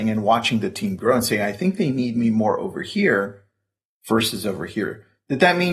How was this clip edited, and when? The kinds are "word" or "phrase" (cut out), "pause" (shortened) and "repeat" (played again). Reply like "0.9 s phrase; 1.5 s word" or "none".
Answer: none